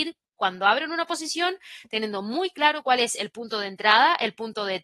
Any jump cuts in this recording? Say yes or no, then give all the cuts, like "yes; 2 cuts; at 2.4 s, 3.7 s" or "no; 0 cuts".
no; 0 cuts